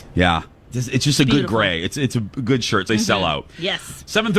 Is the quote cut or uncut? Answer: cut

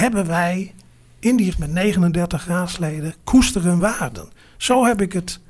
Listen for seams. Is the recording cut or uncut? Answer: cut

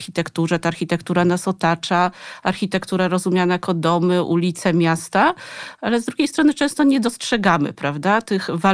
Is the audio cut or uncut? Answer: uncut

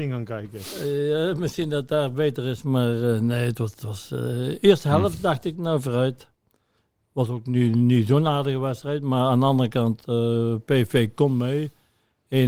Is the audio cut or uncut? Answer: uncut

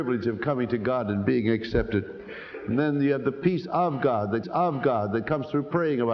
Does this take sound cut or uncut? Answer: cut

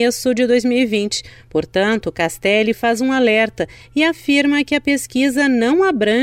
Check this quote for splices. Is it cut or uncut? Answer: uncut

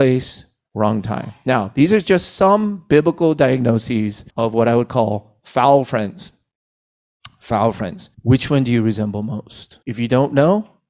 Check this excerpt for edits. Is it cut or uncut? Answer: cut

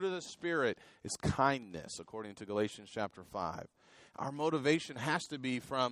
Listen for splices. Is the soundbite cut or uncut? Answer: uncut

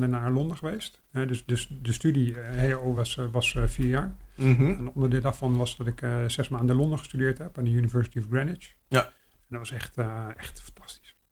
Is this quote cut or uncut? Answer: uncut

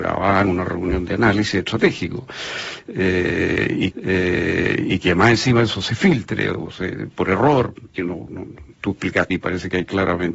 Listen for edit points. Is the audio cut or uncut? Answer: cut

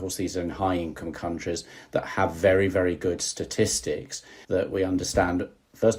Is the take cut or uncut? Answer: cut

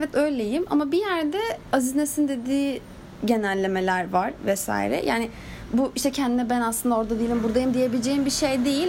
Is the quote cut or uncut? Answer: cut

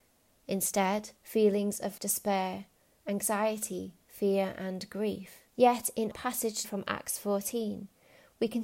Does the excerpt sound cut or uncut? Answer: cut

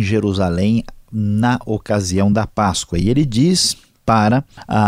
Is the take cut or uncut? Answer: uncut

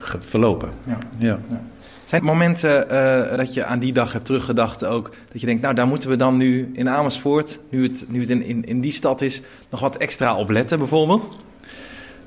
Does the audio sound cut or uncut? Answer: cut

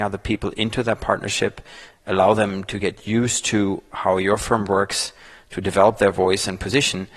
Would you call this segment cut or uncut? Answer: uncut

